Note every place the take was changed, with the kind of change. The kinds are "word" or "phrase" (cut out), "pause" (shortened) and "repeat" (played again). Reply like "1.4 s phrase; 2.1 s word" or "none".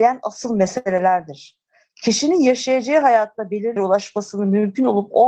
3.8 s word